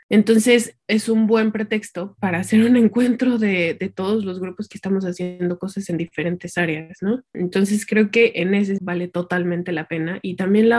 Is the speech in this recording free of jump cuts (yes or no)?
no